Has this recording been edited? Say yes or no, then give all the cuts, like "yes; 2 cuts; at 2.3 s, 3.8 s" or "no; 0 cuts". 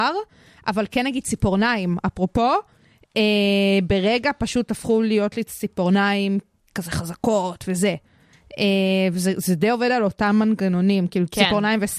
no; 0 cuts